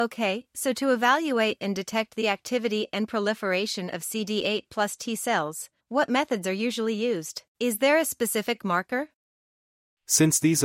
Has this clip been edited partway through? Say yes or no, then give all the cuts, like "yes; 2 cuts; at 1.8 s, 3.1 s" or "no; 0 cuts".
yes; 2 cuts; at 5.8 s, 7.5 s